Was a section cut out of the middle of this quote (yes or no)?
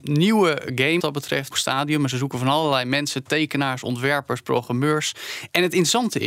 yes